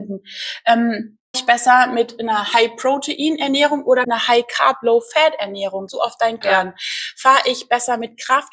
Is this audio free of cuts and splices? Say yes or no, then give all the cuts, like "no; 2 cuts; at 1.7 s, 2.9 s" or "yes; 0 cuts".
no; 4 cuts; at 1.3 s, 4.0 s, 5.9 s, 6.4 s